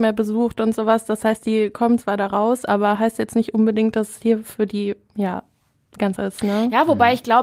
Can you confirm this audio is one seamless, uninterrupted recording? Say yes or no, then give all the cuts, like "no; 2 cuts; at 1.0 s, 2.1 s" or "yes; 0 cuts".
no; 1 cut; at 6.2 s